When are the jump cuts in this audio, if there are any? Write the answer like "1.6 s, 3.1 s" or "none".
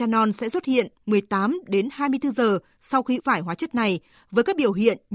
3.2 s